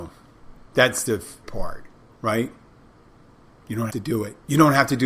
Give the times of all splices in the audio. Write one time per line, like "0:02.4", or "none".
0:01.1
0:01.4
0:03.9